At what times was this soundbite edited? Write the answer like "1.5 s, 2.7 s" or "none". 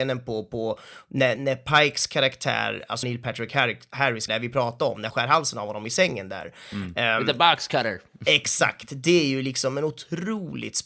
1.4 s, 3.0 s, 4.3 s, 5.1 s